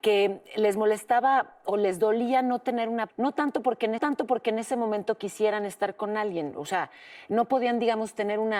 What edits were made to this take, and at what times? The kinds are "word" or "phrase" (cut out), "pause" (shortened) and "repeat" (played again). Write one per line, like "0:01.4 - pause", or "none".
0:03.1 - word
0:04.0 - repeat